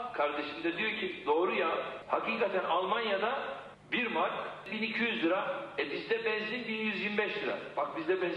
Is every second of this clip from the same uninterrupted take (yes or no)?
yes